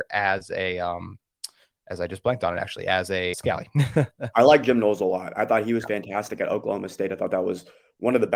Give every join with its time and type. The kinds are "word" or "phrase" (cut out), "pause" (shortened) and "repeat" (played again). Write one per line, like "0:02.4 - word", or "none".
0:03.3 - word